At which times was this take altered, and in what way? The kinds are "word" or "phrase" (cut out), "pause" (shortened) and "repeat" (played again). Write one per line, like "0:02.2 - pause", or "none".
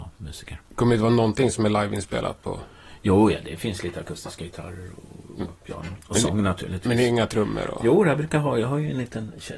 0:05.6 - pause